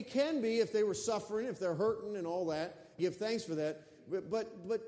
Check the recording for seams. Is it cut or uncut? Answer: cut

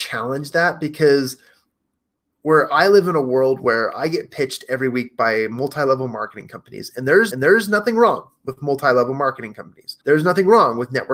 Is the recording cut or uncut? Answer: cut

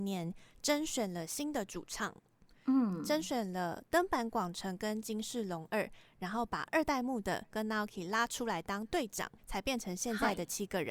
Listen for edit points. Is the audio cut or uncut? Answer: cut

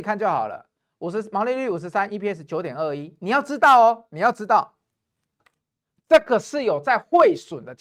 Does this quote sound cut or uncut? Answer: uncut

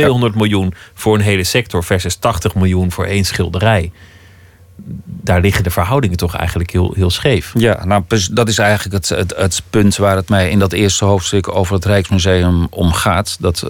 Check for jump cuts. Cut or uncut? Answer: uncut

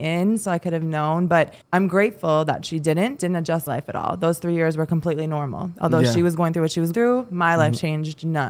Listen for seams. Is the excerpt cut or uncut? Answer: cut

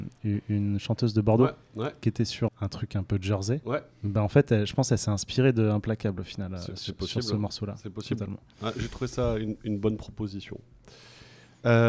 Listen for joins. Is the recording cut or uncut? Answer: cut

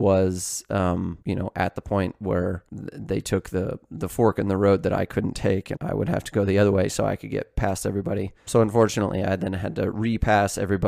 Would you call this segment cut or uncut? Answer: cut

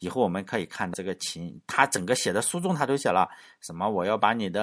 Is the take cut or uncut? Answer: cut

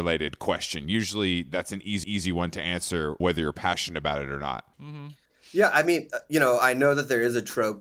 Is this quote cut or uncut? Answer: cut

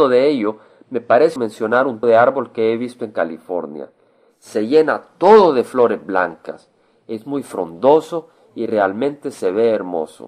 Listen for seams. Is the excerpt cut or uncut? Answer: cut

